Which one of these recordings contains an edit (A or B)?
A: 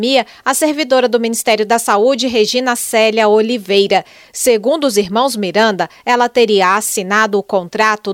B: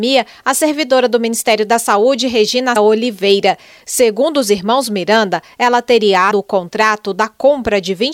B